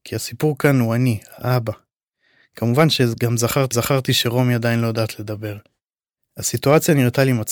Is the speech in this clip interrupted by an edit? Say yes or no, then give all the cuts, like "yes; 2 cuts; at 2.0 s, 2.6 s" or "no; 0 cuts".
yes; 1 cut; at 3.7 s